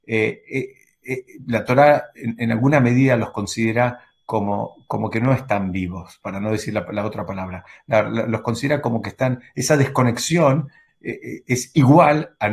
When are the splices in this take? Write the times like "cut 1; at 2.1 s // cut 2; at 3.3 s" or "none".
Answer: none